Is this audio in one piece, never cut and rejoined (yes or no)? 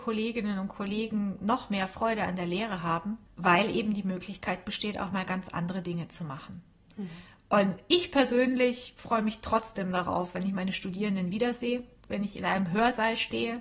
yes